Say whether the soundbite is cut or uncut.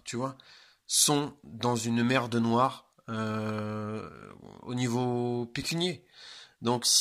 uncut